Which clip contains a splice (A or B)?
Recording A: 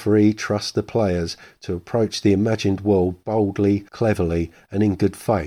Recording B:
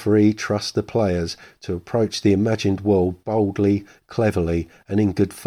A